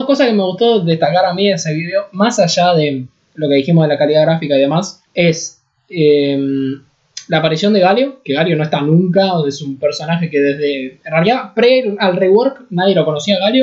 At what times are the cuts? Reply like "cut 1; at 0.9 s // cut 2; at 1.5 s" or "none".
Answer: cut 1; at 5.1 s